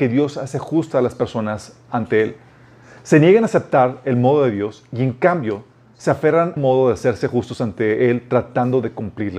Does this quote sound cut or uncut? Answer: cut